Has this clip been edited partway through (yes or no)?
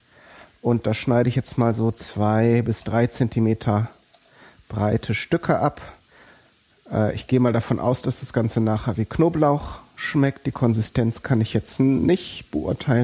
no